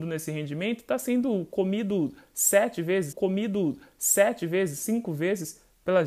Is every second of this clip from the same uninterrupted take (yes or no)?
no